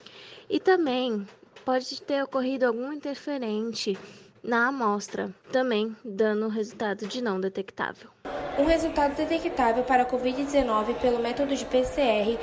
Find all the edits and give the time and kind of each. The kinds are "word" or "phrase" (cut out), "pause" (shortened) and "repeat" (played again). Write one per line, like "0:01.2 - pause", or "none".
0:05.4 - pause